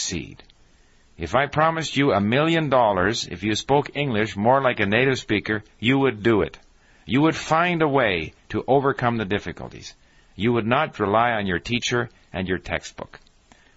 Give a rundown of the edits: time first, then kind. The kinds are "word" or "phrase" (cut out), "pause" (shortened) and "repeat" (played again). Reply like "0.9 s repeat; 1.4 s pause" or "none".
10.9 s word